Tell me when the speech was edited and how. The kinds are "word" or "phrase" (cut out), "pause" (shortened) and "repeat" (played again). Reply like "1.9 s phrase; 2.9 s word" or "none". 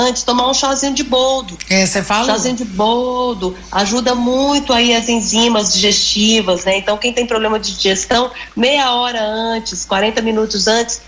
none